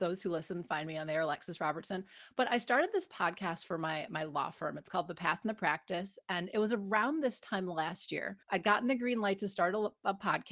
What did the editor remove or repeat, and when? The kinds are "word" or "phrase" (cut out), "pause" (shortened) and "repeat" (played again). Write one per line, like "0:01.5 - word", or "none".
0:08.4 - pause